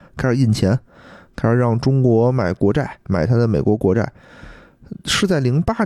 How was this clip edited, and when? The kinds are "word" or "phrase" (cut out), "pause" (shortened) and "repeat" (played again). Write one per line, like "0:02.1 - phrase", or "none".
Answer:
0:03.0 - pause